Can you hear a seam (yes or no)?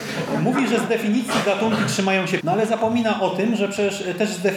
yes